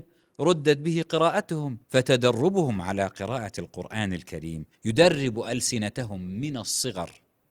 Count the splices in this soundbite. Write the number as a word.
two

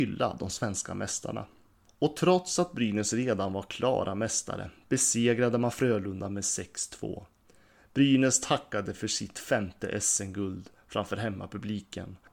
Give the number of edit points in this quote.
zero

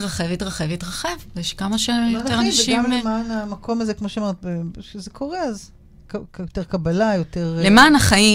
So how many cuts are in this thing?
zero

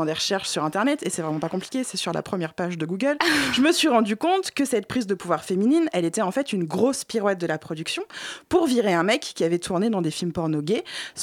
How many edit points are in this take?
zero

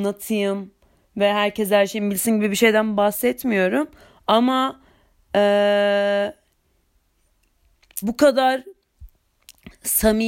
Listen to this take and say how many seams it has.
one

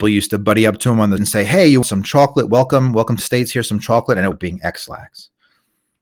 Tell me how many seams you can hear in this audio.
four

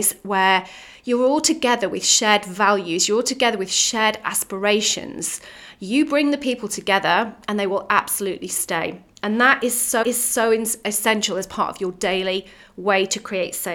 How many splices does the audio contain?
one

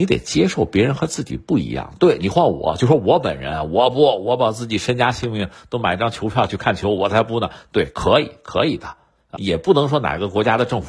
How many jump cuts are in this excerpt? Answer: zero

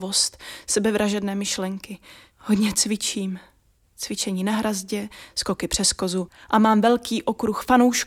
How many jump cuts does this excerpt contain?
zero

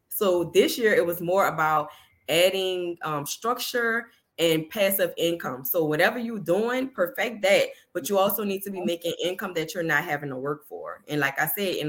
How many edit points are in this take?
zero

